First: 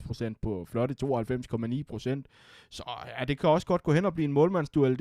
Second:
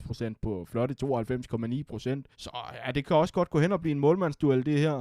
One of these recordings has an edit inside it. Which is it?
second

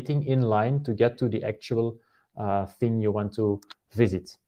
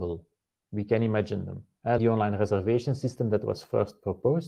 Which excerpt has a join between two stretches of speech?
second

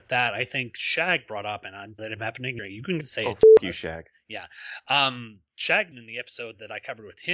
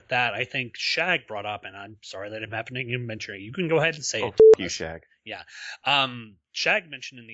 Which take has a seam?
first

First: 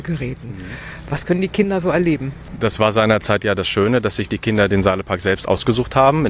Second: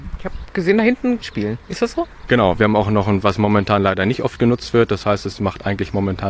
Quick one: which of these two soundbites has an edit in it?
second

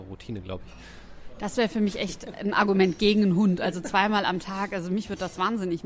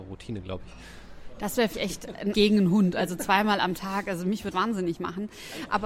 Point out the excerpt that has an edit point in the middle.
second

